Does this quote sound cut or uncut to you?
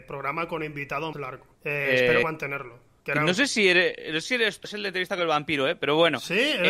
cut